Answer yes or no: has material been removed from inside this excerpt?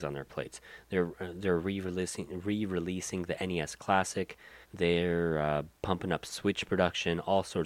yes